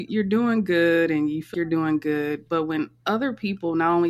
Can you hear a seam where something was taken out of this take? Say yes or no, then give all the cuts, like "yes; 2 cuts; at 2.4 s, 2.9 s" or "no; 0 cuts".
yes; 1 cut; at 1.5 s